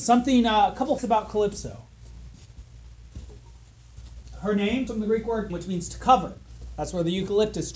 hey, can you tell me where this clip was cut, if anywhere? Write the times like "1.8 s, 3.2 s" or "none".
1.0 s, 4.9 s, 5.5 s

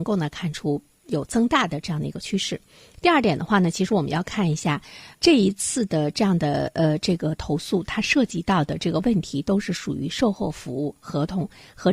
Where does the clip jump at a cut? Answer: 5.1 s

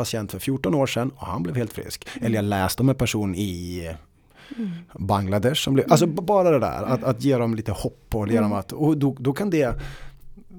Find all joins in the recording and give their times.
none

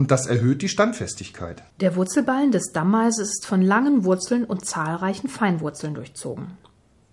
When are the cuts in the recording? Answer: 1.7 s

